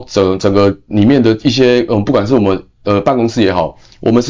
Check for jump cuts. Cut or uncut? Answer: uncut